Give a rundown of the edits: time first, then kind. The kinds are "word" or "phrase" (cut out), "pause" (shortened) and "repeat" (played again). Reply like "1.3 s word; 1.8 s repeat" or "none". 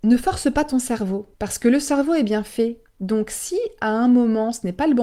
1.3 s pause